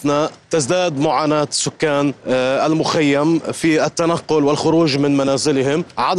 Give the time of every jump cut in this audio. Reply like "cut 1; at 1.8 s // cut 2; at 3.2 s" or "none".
none